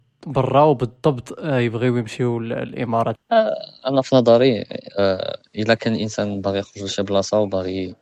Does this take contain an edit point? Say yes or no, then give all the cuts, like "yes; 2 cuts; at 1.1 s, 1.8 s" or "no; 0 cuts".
yes; 1 cut; at 3.2 s